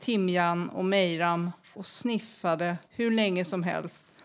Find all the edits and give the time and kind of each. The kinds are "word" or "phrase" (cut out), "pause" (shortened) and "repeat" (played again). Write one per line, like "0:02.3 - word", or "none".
0:01.7 - phrase
0:02.8 - pause